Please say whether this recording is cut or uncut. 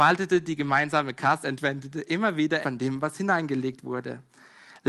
cut